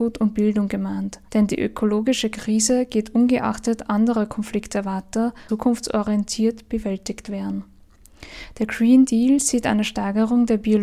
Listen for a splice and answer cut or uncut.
cut